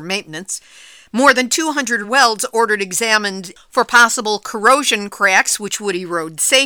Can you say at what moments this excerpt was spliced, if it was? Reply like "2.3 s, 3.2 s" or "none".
2.0 s